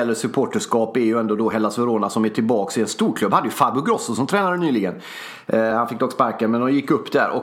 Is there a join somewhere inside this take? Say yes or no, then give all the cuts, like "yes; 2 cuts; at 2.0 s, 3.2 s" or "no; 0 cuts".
no; 0 cuts